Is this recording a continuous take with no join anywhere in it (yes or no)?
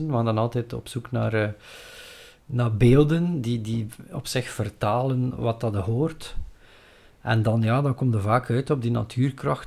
yes